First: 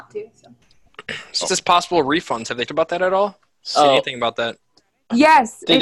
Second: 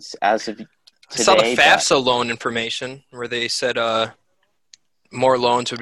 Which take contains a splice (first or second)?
first